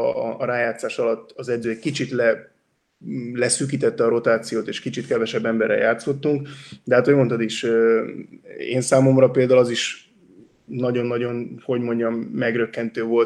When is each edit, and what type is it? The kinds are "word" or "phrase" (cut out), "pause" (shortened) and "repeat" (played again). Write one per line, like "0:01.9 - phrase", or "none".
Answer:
none

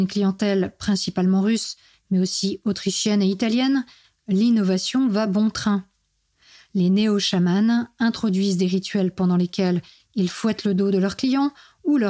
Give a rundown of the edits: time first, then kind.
none

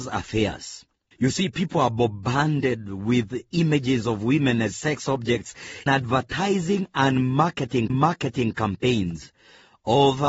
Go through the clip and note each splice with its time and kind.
0:01.1 - pause
0:05.9 - word
0:07.9 - repeat

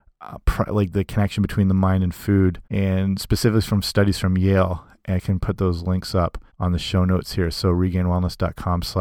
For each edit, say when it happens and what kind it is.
0:02.6 - pause
0:06.5 - pause

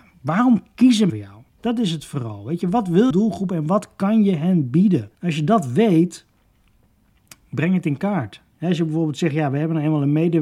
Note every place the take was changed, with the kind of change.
0:01.1 - word
0:01.5 - pause
0:03.1 - word
0:05.1 - pause

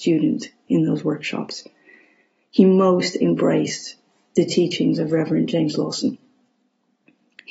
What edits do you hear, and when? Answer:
none

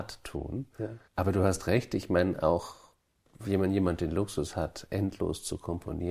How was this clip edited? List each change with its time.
0:01.1 - pause

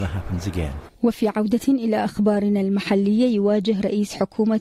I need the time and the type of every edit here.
0:00.9 - pause

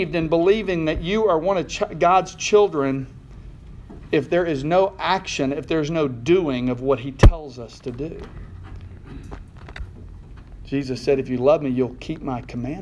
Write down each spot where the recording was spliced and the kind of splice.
none

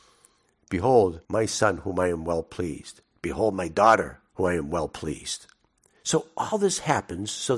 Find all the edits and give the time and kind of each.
0:01.2 - pause
0:04.3 - pause

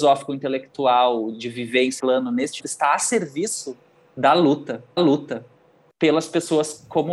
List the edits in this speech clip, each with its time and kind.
0:02.0 - word
0:02.6 - word
0:05.0 - repeat

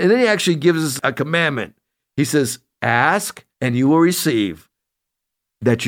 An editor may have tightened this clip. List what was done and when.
0:03.5 - pause

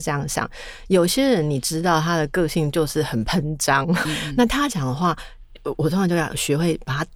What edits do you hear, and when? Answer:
0:04.1 - word

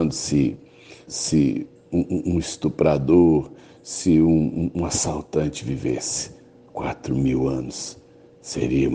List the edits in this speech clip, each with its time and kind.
0:01.1 - word

